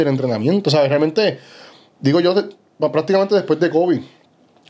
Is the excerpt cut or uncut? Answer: uncut